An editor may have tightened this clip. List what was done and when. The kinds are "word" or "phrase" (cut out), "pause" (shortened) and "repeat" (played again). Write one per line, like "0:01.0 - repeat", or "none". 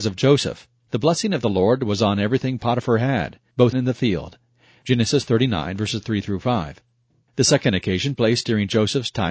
0:03.7 - phrase
0:08.2 - word